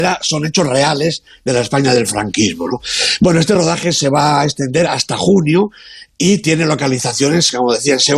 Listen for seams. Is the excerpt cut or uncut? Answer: uncut